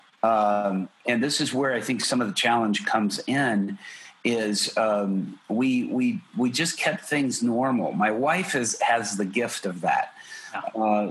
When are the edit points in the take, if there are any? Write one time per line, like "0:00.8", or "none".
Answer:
none